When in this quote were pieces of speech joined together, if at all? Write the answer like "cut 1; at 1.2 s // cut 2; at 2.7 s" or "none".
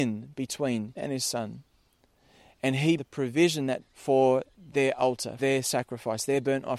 cut 1; at 1.0 s // cut 2; at 3.0 s // cut 3; at 3.8 s // cut 4; at 4.5 s // cut 5; at 5.4 s